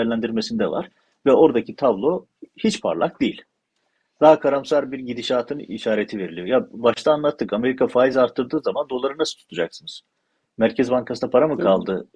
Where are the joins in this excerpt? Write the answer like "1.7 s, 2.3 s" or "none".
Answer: none